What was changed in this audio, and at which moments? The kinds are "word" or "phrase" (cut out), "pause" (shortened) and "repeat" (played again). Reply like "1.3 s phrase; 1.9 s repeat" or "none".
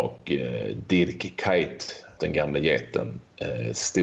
2.2 s word

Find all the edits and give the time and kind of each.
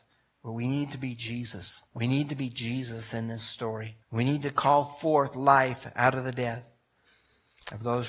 1.9 s pause; 4.0 s pause

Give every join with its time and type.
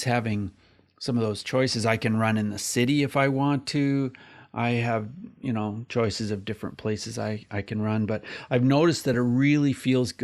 none

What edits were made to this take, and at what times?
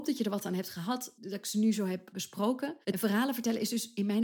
2.8 s pause

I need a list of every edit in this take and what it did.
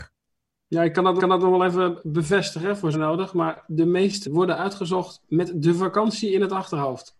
1.2 s repeat; 2.9 s word; 4.2 s word

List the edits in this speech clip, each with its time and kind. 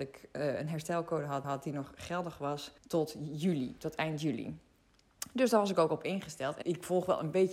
1.4 s repeat; 2.8 s pause; 6.6 s word

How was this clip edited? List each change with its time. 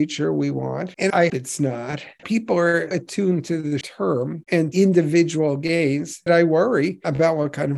1.3 s word; 2.2 s word; 2.9 s word; 3.8 s word; 4.7 s word; 6.3 s word

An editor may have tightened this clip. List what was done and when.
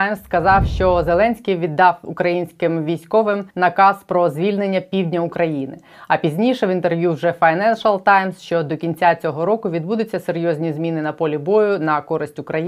3.5 s pause

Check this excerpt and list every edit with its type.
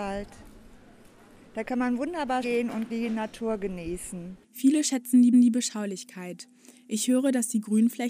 2.4 s word; 2.9 s word; 4.4 s pause; 5.3 s repeat

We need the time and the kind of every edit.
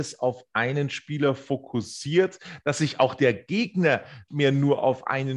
4.3 s word

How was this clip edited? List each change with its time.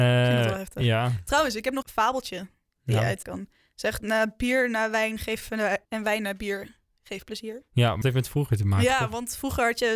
1.8 s word; 3.2 s word; 4.0 s word; 5.8 s word; 8.0 s word

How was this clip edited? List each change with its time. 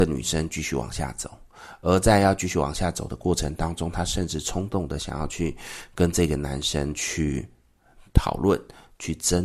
none

